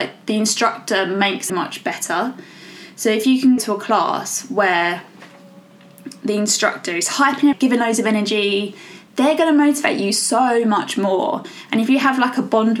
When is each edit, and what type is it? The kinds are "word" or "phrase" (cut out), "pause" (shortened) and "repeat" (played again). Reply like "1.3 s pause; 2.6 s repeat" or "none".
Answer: 1.5 s phrase; 3.6 s word; 7.5 s phrase